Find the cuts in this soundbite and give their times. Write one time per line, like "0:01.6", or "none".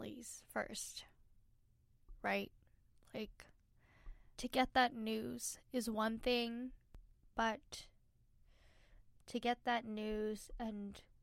0:04.3
0:07.2